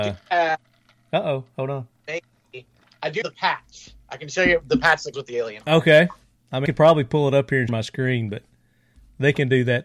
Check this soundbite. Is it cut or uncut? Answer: cut